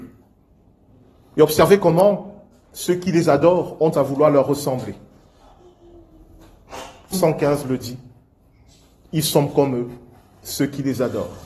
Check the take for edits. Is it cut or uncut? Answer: cut